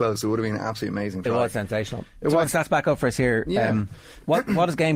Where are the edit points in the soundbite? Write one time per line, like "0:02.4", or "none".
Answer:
0:02.4